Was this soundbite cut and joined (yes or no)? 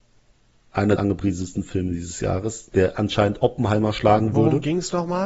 yes